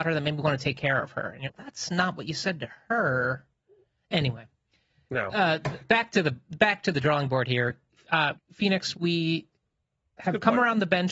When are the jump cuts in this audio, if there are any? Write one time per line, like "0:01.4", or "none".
0:01.4
0:05.8
0:08.3
0:08.9